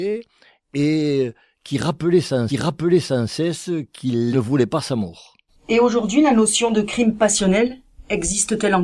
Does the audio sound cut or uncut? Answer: cut